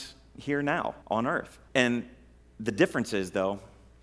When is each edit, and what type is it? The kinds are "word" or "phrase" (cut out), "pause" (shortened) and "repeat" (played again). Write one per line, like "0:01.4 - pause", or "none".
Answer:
0:01.0 - pause
0:01.7 - pause